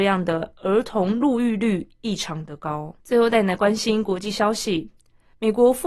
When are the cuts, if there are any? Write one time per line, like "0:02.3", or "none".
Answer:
0:03.0